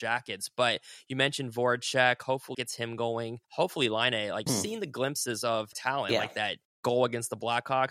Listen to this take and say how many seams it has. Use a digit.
4